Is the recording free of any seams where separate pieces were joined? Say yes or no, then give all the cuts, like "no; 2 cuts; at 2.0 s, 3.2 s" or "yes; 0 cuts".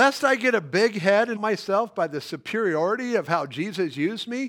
no; 1 cut; at 1.4 s